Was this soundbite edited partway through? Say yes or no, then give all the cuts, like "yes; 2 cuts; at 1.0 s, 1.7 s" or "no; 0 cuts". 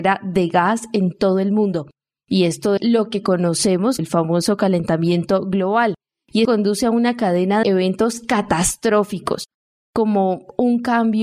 yes; 4 cuts; at 2.8 s, 4.0 s, 6.4 s, 7.6 s